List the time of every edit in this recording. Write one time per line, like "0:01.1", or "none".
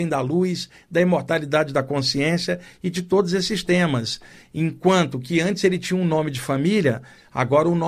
none